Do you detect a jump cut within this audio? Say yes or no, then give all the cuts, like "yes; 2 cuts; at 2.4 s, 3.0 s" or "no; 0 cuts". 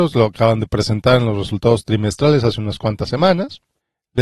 no; 0 cuts